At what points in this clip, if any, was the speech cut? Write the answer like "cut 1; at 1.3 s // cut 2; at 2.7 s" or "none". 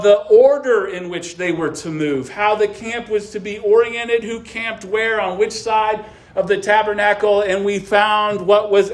none